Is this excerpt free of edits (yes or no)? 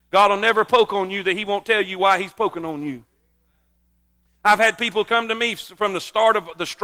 yes